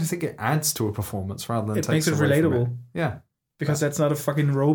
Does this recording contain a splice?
no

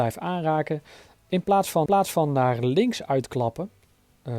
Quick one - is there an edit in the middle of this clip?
yes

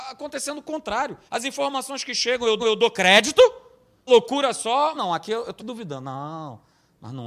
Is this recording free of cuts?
no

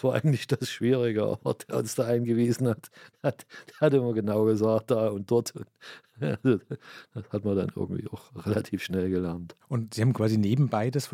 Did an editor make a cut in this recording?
no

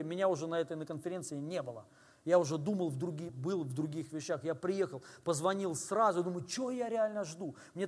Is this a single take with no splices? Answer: no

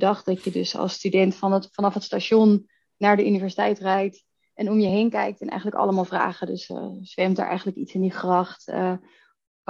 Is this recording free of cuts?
yes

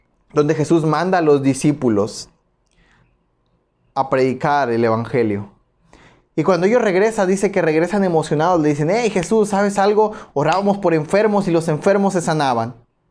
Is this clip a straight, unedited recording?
no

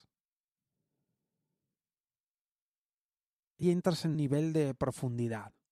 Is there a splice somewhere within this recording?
yes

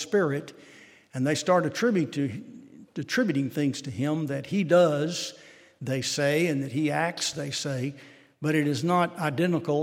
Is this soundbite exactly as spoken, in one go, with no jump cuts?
yes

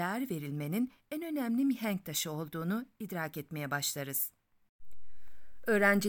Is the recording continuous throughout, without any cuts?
yes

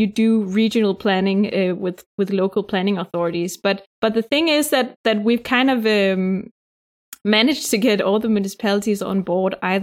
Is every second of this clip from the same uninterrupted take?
no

